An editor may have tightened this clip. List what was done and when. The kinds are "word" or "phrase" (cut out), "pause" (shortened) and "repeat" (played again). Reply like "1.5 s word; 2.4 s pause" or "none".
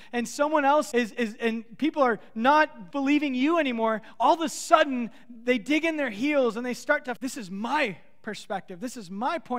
0.9 s word; 2.9 s word; 7.2 s phrase